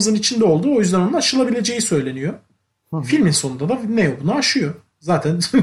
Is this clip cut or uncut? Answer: uncut